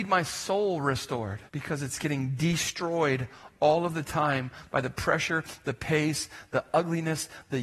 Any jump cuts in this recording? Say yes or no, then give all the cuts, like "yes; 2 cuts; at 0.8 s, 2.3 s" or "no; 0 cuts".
yes; 1 cut; at 1.5 s